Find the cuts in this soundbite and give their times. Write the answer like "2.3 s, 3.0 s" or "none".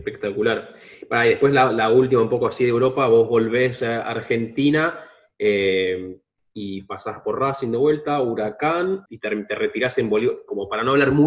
9.1 s

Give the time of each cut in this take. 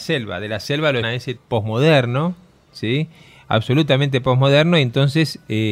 1.0 s, 1.4 s

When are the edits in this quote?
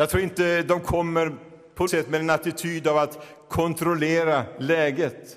1.9 s

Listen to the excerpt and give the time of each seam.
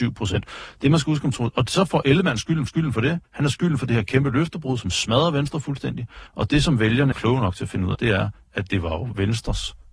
2.7 s, 3.2 s, 6.3 s, 7.1 s, 7.9 s

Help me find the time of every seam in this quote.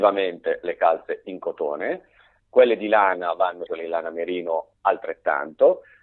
3.7 s

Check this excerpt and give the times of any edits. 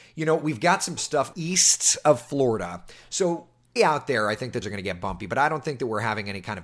1.0 s, 1.3 s, 3.8 s, 4.6 s

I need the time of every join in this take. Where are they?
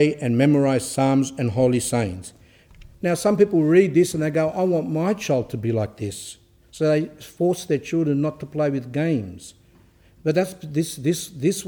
2.9 s

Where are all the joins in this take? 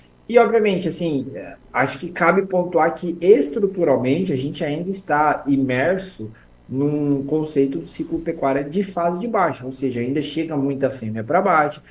none

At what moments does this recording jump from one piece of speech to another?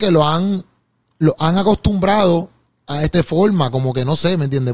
3.1 s

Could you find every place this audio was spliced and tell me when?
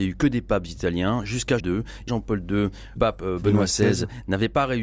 1.6 s, 2.1 s, 3.0 s

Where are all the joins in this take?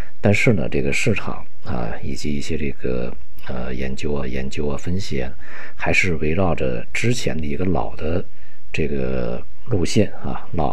4.2 s

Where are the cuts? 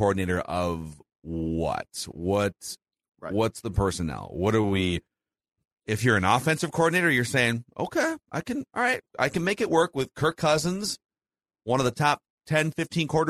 none

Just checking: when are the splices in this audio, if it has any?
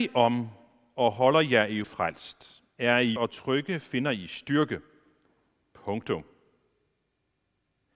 1.8 s, 3.2 s

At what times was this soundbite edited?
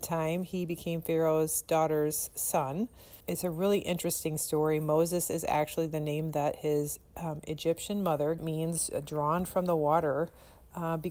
3.2 s, 8.4 s

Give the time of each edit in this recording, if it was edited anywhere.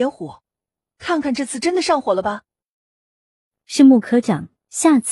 none

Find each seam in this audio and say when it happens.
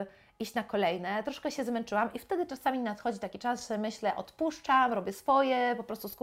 none

